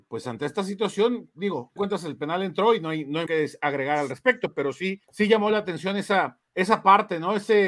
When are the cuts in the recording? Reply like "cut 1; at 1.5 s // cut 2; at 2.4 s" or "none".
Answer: cut 1; at 1.8 s // cut 2; at 3.3 s // cut 3; at 5.0 s // cut 4; at 6.5 s